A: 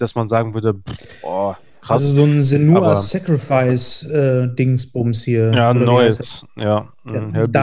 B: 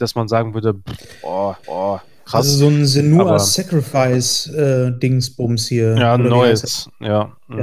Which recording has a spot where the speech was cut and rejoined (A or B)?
B